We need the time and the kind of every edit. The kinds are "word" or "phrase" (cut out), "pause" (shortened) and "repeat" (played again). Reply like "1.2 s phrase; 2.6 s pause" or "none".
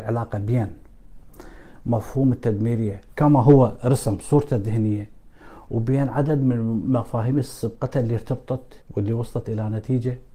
8.8 s pause